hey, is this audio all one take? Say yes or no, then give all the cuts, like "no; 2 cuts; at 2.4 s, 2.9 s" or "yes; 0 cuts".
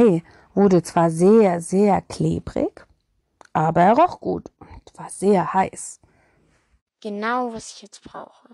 yes; 0 cuts